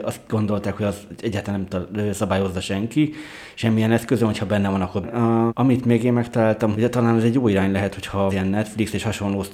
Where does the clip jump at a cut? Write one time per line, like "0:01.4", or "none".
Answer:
0:05.0
0:05.5
0:06.7
0:08.3